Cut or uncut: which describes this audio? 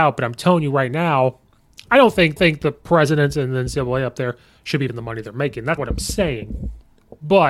cut